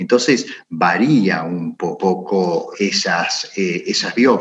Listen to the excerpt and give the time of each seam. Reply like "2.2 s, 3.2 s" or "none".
2.0 s, 2.7 s